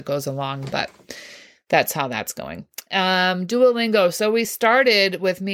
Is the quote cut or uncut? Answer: uncut